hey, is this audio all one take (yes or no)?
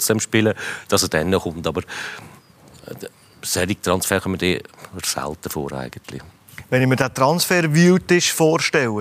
yes